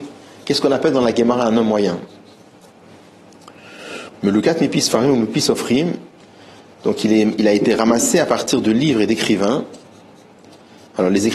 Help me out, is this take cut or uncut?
uncut